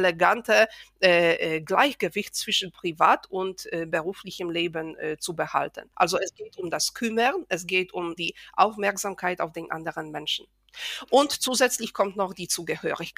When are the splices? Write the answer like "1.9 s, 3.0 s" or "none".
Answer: 5.9 s, 8.2 s